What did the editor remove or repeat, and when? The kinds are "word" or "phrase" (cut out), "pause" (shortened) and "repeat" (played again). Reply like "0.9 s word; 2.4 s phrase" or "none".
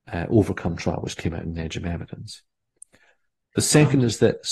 none